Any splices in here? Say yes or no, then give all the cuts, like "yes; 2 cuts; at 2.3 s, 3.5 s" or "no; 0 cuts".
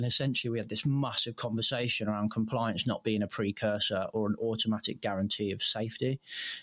no; 0 cuts